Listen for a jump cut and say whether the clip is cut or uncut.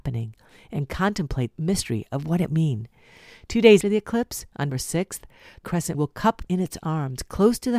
cut